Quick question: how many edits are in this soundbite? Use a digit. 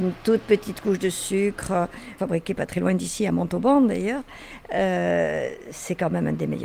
1